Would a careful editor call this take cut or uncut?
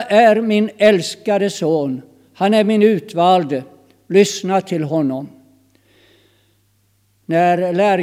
uncut